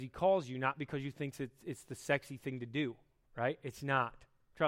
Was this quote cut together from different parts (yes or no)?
no